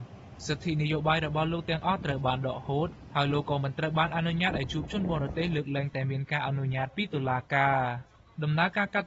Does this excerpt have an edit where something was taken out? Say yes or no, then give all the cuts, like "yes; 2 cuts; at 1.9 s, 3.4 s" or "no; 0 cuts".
no; 0 cuts